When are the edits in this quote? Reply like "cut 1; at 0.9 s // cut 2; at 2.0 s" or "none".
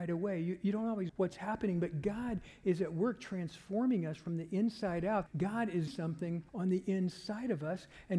cut 1; at 1.1 s // cut 2; at 5.3 s // cut 3; at 5.9 s // cut 4; at 6.5 s